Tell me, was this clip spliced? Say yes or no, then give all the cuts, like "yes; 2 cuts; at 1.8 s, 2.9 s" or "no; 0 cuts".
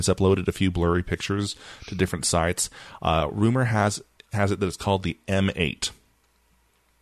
no; 0 cuts